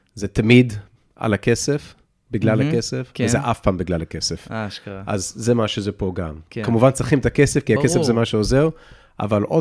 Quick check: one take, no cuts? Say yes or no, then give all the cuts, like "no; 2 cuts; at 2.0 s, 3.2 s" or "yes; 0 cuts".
yes; 0 cuts